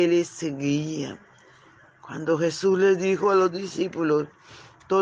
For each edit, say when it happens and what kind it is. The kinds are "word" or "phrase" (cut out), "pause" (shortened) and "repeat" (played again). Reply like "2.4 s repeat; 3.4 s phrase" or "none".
none